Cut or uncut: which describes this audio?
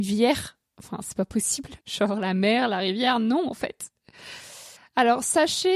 cut